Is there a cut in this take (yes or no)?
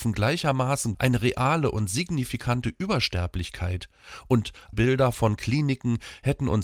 yes